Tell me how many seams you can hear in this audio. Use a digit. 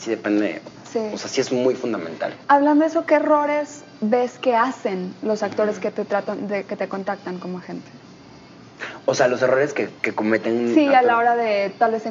2